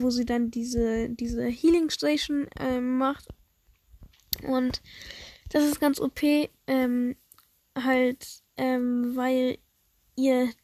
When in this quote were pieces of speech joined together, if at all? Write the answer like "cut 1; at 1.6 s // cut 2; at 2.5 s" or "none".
none